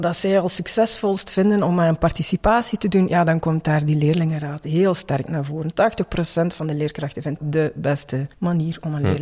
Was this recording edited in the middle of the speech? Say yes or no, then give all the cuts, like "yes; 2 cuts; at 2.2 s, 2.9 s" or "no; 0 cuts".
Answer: yes; 2 cuts; at 7.4 s, 8.3 s